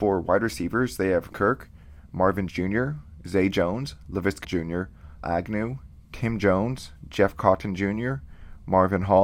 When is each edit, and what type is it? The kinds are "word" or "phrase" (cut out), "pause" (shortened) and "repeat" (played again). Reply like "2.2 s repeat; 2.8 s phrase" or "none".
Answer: 1.3 s word; 2.5 s word; 4.4 s word; 5.2 s phrase